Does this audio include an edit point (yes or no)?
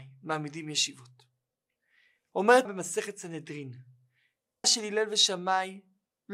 yes